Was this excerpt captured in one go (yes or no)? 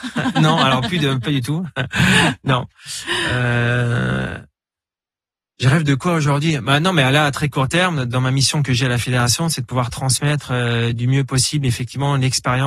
yes